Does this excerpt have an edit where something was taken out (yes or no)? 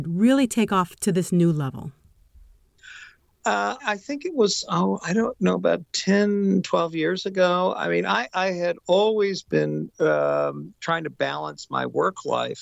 yes